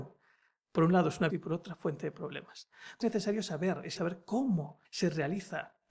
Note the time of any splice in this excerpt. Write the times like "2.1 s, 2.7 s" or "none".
1.3 s, 3.0 s, 4.0 s, 4.8 s